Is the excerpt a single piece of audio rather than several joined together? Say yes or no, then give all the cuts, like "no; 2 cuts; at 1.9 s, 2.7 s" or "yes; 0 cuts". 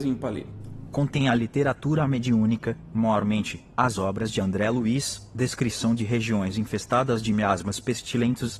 yes; 0 cuts